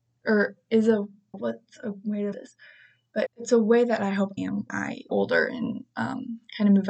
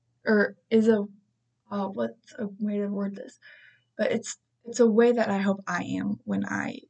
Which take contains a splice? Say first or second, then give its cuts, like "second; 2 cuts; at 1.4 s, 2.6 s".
first; 6 cuts; at 1.3 s, 2.3 s, 3.3 s, 4.4 s, 4.7 s, 5.1 s